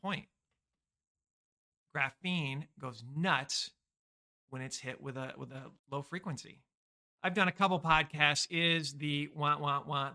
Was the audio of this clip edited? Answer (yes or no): yes